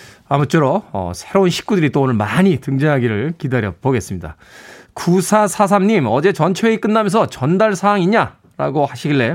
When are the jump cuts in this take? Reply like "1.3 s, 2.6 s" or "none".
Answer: none